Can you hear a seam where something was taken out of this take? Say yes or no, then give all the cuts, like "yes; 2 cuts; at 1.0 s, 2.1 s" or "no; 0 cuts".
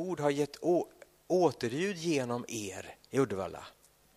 yes; 1 cut; at 3.0 s